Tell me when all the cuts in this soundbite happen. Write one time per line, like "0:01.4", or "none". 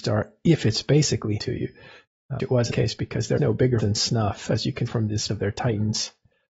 0:01.4
0:02.4
0:02.7
0:03.4
0:03.8
0:04.9
0:05.3